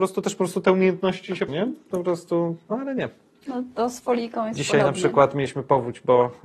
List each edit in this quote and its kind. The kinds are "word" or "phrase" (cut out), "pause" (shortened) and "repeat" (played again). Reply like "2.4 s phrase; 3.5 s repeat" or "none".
1.5 s word

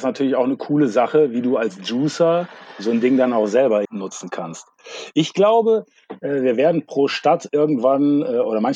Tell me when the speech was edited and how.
3.8 s word

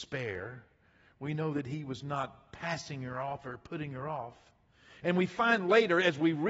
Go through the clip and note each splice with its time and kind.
none

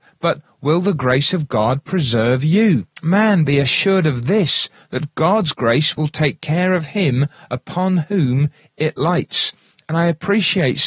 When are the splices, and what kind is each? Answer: 2.9 s pause

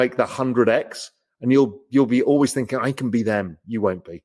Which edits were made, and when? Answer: none

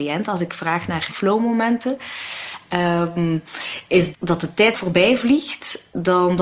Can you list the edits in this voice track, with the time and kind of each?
1.1 s word; 4.1 s word; 4.7 s word

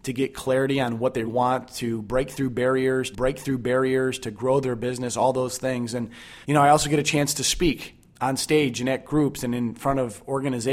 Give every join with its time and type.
1.2 s word; 3.1 s repeat; 6.4 s pause

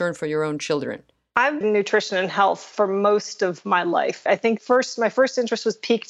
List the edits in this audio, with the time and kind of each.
1.6 s phrase; 4.3 s word; 4.6 s word

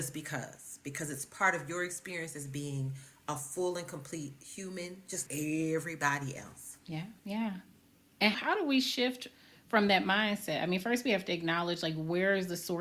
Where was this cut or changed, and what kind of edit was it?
5.3 s word; 7.2 s pause; 8.3 s phrase

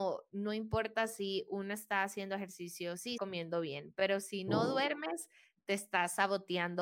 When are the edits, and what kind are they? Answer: 3.2 s word

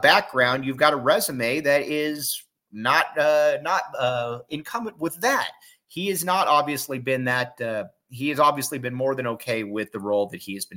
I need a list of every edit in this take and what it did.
none

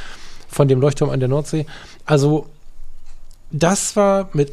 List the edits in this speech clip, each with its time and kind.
none

